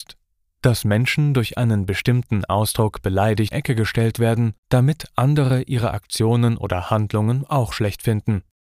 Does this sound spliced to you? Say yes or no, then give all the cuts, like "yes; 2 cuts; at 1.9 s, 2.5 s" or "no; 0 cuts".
yes; 2 cuts; at 3.5 s, 4.6 s